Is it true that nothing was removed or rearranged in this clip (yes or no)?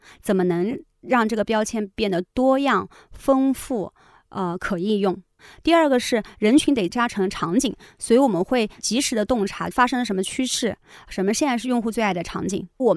yes